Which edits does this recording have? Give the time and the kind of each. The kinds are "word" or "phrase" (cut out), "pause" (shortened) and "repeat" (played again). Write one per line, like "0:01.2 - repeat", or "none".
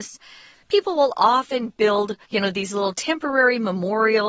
0:02.2 - pause